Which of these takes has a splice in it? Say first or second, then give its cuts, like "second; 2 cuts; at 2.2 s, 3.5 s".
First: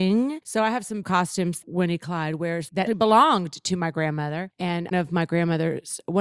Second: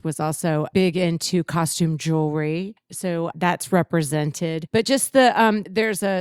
first; 4 cuts; at 1.0 s, 1.6 s, 2.9 s, 4.9 s